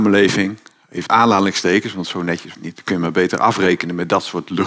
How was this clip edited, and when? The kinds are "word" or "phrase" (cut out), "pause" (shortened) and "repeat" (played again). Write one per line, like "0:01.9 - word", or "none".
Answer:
0:01.1 - word
0:02.5 - word